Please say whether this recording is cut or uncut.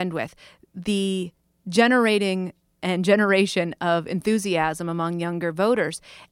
uncut